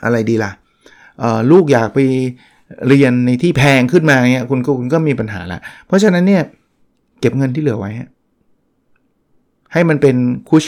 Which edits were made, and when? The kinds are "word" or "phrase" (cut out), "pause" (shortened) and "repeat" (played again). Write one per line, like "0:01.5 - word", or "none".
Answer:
none